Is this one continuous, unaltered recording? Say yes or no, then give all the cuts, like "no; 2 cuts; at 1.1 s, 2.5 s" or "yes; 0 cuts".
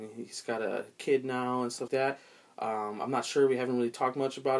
no; 1 cut; at 1.9 s